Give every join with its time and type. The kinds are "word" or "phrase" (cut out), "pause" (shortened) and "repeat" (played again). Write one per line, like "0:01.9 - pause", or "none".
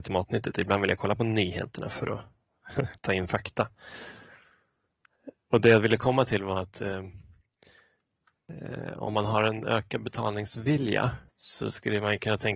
0:03.0 - pause
0:11.3 - pause